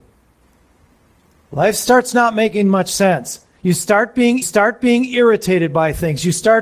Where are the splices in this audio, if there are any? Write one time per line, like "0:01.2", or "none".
0:04.4